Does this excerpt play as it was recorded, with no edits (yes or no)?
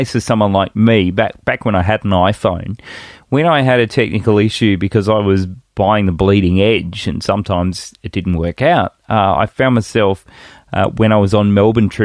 yes